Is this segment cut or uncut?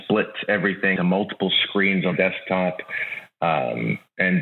cut